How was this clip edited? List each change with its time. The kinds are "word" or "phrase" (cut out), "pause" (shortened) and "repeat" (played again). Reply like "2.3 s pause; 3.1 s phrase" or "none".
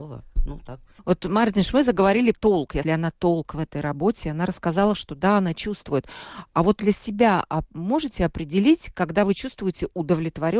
1.0 s pause; 2.3 s word; 2.8 s phrase; 6.8 s phrase